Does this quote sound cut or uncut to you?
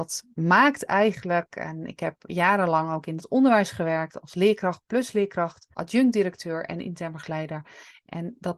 cut